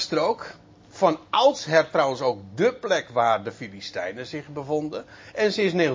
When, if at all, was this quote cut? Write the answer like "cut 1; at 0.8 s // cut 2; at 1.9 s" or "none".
none